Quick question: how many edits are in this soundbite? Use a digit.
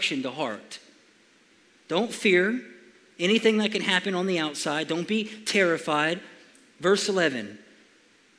0